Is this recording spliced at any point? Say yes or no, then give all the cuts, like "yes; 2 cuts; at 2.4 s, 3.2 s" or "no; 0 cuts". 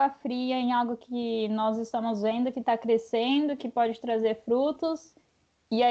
no; 0 cuts